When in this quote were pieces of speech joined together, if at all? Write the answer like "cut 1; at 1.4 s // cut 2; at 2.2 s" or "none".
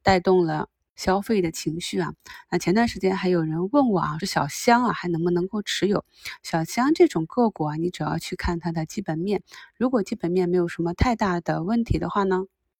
cut 1; at 4.2 s